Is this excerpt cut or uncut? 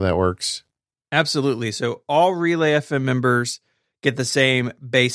uncut